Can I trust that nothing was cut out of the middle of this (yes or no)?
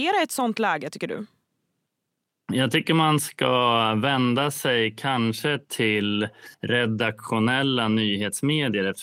no